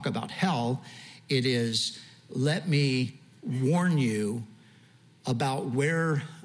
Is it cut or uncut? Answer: uncut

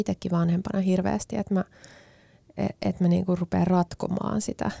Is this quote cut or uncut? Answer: uncut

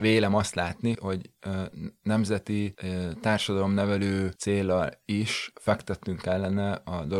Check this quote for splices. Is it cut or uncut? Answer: cut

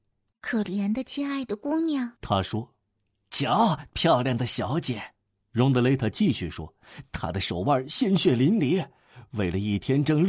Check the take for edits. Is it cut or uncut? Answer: cut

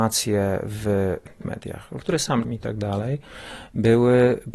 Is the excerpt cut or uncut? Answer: cut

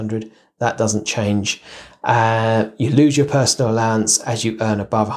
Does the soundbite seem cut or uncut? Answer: uncut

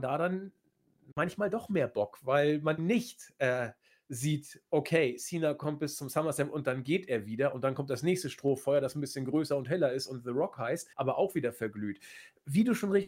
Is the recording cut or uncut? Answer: cut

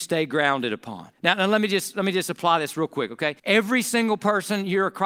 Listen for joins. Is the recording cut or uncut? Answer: cut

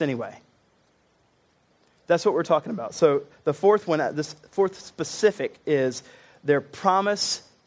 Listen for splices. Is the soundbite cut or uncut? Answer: uncut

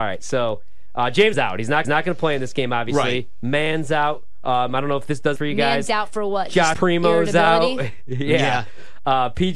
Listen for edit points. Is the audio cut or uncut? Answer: cut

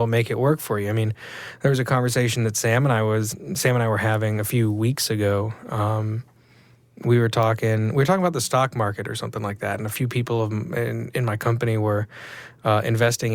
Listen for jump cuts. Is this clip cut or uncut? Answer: uncut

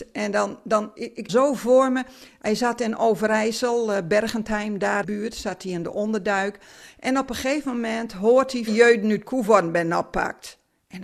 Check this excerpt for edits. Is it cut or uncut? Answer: cut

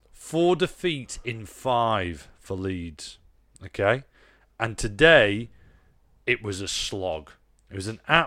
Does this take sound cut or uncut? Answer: uncut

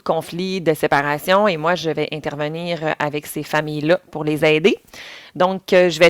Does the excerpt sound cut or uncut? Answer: uncut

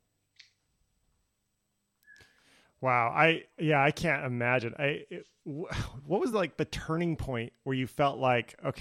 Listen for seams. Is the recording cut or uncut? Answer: uncut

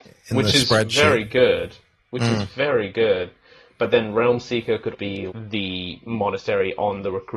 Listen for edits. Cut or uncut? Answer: cut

